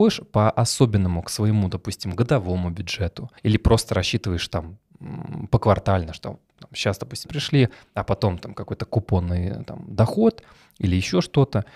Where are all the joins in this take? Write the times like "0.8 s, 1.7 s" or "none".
3.4 s, 7.3 s